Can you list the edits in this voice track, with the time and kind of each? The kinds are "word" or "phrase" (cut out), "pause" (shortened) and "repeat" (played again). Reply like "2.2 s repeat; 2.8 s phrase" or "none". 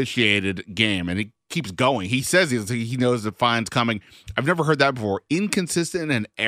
none